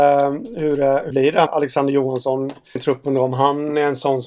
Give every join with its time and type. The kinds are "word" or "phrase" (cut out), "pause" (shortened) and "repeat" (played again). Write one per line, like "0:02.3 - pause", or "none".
0:01.1 - word
0:01.5 - word
0:02.8 - word